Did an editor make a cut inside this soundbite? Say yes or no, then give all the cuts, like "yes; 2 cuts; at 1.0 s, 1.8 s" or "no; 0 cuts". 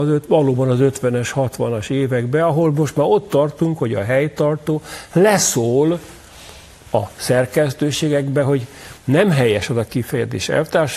no; 0 cuts